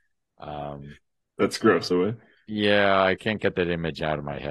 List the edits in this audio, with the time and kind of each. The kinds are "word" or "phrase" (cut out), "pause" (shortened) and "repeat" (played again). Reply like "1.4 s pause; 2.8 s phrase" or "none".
1.9 s phrase